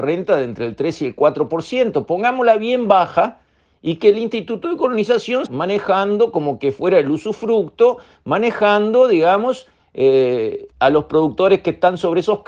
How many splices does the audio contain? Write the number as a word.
two